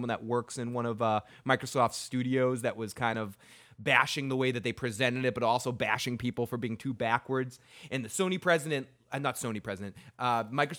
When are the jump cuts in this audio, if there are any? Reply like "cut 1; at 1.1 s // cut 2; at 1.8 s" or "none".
none